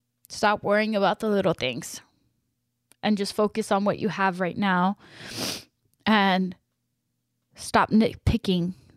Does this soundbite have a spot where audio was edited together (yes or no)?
no